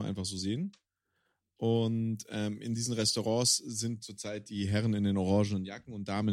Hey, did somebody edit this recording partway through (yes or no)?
no